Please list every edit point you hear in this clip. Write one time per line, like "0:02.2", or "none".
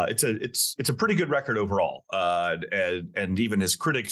none